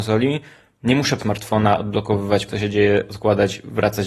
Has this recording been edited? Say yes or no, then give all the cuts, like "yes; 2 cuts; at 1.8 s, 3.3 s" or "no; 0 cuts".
yes; 2 cuts; at 1.2 s, 2.5 s